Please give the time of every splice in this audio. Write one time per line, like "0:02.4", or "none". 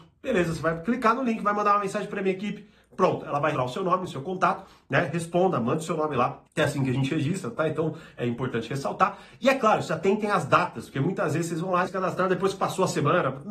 0:03.5
0:06.5
0:11.9